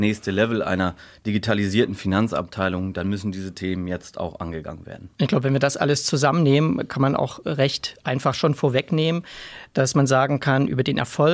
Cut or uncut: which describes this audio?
cut